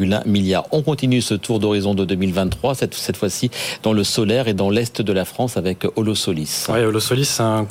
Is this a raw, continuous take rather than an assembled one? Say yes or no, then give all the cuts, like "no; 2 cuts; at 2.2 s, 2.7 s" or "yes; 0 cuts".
yes; 0 cuts